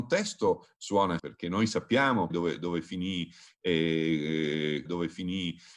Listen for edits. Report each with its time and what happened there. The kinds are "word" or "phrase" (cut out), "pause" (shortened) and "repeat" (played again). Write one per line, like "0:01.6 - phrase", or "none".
0:01.2 - word
0:02.3 - word
0:04.9 - repeat